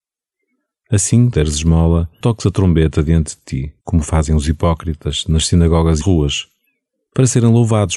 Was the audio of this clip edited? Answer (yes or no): yes